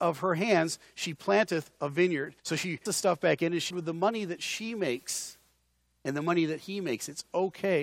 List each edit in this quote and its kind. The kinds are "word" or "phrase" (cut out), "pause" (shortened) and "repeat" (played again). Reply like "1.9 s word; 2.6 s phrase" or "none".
2.4 s pause; 2.9 s word; 3.7 s phrase